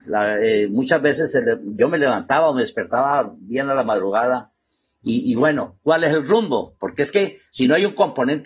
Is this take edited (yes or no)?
no